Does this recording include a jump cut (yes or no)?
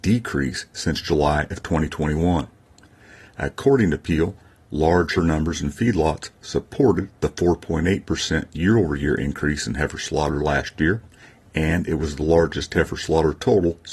yes